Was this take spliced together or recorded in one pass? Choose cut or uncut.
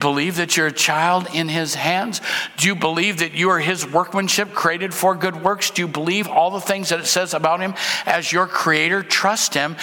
uncut